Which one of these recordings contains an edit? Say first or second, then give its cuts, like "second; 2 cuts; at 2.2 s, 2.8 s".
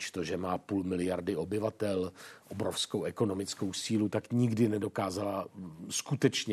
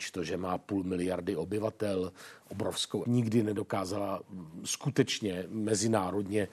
second; 1 cut; at 3.0 s